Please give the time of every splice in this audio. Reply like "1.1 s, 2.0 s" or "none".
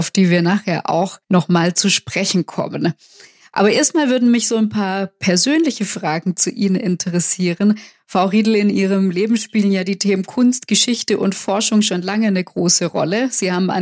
none